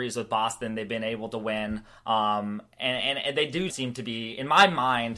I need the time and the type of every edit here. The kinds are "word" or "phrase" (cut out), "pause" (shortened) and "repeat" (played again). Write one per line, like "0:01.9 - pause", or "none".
0:03.7 - word